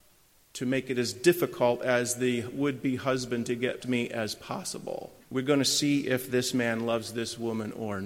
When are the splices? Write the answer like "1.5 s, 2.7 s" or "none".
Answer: 3.8 s, 5.2 s